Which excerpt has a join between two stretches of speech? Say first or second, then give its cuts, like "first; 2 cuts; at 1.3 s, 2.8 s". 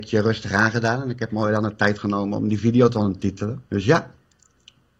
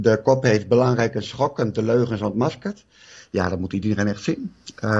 first; 1 cut; at 3.7 s